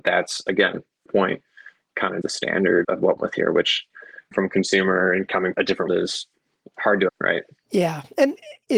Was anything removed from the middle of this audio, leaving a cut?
yes; 8 cuts; at 1.1 s, 2.2 s, 2.8 s, 3.2 s, 4.3 s, 5.5 s, 5.9 s, 7.1 s

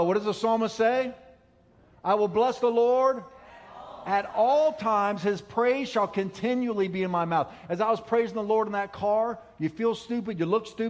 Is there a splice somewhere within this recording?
no; 0 cuts

